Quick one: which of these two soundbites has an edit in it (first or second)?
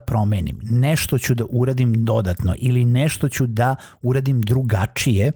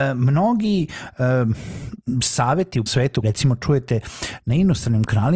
second